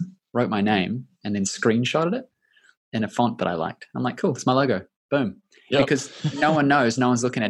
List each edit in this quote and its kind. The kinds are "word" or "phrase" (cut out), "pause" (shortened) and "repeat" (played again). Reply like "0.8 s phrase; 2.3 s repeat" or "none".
none